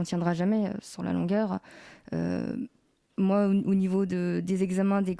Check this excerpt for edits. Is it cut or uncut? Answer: uncut